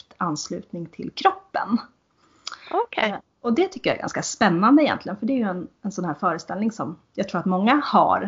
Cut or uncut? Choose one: uncut